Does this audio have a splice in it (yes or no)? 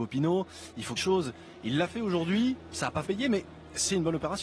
yes